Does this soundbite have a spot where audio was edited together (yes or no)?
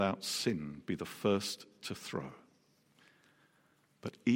no